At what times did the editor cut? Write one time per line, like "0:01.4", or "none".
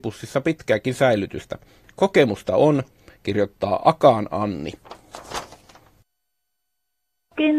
none